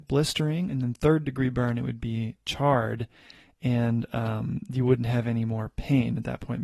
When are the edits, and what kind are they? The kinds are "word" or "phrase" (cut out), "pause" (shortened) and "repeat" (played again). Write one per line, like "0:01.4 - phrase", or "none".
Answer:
none